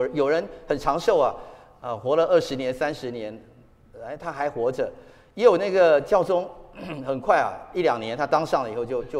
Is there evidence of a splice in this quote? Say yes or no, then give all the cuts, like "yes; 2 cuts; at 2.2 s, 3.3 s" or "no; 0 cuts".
no; 0 cuts